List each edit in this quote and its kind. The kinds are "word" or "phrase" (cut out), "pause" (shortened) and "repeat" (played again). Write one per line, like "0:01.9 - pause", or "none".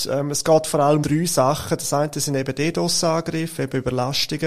0:01.0 - word